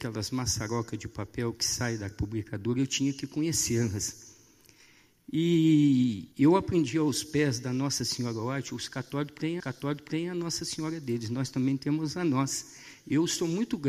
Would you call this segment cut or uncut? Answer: cut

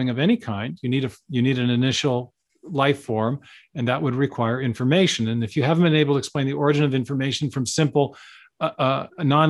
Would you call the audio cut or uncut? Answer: uncut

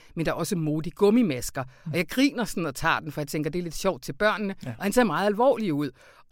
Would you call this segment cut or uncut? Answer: uncut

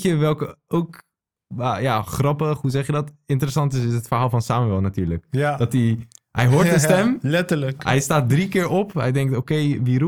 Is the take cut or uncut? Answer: uncut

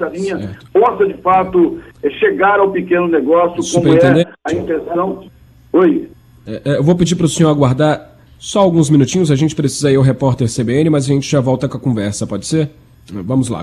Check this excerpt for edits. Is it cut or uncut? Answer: uncut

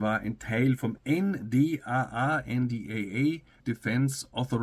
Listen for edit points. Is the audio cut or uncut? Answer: cut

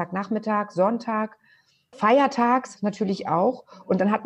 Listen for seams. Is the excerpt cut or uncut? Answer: cut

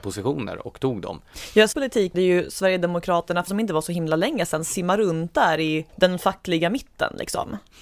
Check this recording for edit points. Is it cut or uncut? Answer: cut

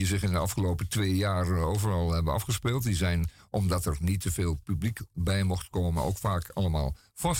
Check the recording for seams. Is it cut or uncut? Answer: uncut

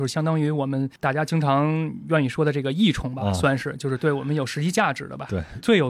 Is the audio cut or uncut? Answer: cut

